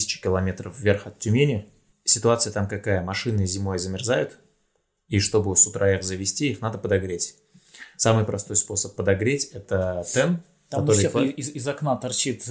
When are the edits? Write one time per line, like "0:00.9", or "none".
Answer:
none